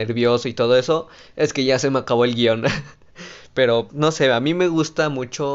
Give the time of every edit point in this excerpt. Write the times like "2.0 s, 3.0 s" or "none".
3.9 s